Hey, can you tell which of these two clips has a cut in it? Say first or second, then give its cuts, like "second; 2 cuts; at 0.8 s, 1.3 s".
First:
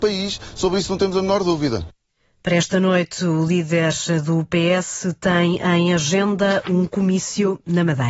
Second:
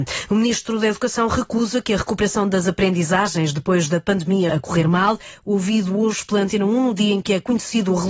second; 1 cut; at 4.5 s